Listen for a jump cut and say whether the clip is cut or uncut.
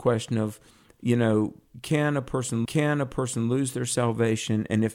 cut